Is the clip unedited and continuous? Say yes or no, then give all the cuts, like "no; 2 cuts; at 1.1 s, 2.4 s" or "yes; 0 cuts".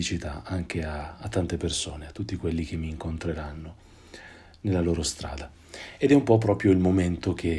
yes; 0 cuts